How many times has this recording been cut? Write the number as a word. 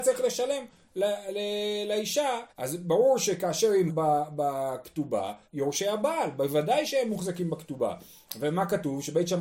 three